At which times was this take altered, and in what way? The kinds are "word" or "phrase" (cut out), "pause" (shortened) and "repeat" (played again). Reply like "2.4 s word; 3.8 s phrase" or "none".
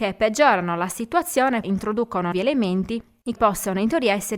1.6 s word; 2.3 s word; 3.4 s word